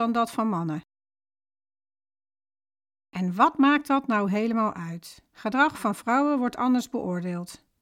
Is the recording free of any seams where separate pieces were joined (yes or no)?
no